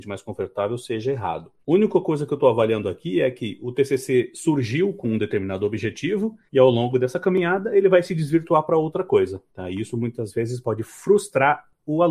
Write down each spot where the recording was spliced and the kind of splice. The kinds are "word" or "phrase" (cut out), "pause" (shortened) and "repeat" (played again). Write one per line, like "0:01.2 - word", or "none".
0:01.6 - pause
0:06.5 - pause
0:09.5 - pause